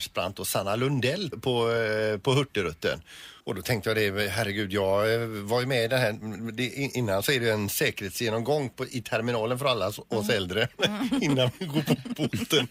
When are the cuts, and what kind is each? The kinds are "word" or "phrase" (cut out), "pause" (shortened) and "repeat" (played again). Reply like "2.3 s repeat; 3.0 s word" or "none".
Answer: 1.3 s word; 3.4 s pause